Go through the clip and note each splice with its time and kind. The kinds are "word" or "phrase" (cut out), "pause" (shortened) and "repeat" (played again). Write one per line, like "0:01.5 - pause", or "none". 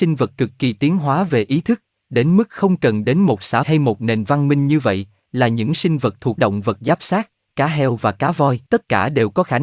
0:03.6 - word
0:06.4 - word
0:08.7 - pause